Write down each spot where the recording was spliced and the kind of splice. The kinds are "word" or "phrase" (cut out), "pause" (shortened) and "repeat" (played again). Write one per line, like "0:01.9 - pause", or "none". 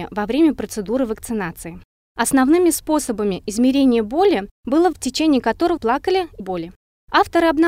0:04.9 - word
0:05.8 - word
0:06.4 - word